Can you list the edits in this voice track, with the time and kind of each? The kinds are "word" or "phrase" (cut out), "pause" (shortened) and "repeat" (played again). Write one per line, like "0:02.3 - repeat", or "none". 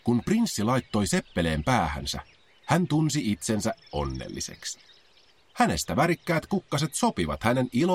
none